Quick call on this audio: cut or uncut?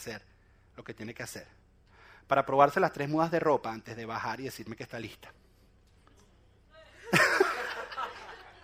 uncut